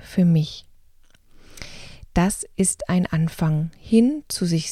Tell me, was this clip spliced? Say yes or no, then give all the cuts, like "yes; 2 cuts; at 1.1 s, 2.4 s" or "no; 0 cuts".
no; 0 cuts